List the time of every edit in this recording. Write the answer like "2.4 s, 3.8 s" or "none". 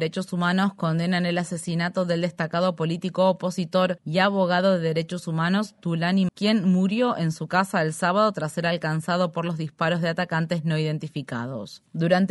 6.3 s